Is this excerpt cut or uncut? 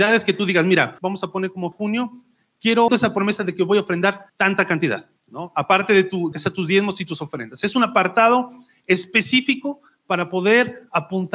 cut